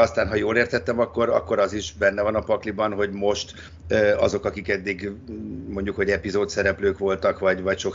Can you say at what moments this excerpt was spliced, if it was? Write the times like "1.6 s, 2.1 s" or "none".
none